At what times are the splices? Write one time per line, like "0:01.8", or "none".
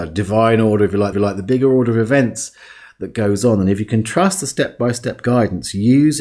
0:01.1